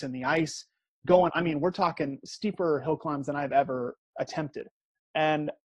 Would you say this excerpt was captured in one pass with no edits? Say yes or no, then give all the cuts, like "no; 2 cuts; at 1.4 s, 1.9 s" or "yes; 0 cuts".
no; 1 cut; at 1.3 s